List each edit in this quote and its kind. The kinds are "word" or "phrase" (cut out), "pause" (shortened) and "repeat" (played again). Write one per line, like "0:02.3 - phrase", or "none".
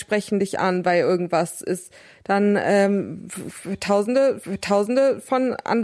0:04.4 - repeat